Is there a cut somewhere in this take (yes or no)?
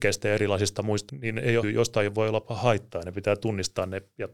yes